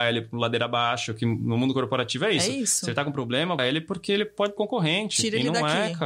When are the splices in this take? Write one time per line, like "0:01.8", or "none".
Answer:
0:03.6
0:04.6

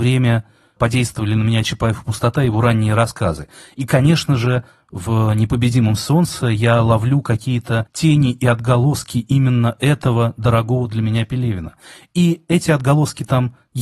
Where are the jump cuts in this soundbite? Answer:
none

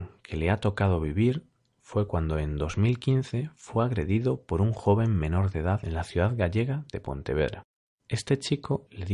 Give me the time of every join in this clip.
none

